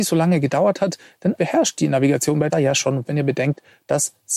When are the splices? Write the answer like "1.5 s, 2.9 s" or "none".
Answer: 1.4 s, 2.5 s, 3.1 s